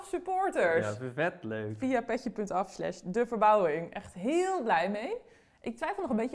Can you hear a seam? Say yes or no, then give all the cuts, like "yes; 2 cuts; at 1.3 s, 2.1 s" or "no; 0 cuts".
no; 0 cuts